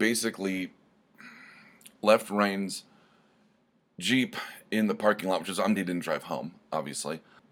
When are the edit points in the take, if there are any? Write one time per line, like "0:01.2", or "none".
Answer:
0:05.8